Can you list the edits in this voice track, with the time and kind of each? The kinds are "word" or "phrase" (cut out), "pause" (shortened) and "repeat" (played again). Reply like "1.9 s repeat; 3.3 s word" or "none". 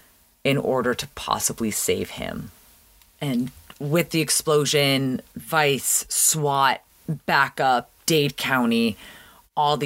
none

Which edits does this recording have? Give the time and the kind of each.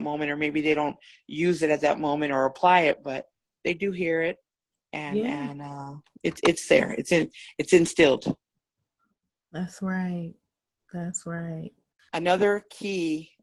none

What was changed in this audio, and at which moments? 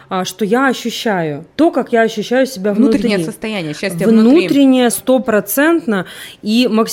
1.5 s word; 4.9 s phrase

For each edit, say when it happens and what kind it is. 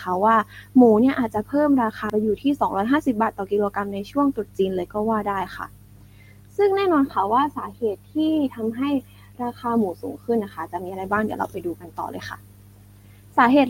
none

